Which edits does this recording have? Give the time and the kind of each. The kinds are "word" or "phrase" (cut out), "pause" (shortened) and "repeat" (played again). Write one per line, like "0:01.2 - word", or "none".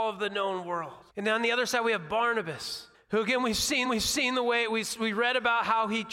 0:01.1 - pause
0:02.9 - pause
0:03.8 - repeat